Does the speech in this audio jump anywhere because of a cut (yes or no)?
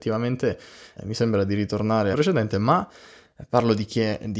yes